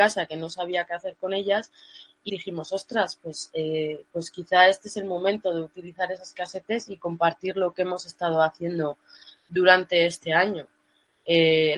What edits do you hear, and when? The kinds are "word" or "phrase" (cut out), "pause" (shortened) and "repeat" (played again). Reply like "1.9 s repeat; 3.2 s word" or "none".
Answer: 2.3 s word